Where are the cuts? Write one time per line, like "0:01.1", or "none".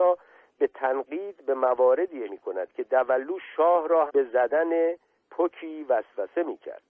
0:02.3
0:04.1